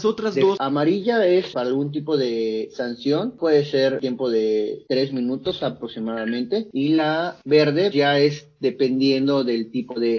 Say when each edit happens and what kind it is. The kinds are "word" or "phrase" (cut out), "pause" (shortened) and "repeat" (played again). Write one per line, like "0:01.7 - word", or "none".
0:07.9 - word